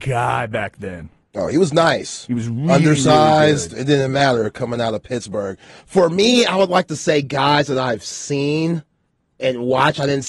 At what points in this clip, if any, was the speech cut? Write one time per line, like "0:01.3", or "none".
none